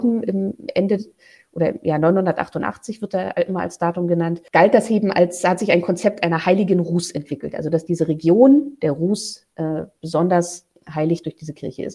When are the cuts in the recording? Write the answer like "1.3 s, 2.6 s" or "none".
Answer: none